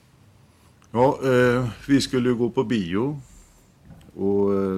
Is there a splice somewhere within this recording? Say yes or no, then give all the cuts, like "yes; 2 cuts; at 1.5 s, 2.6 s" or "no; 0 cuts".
no; 0 cuts